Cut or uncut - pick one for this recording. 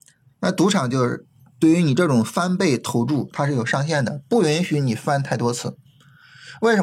cut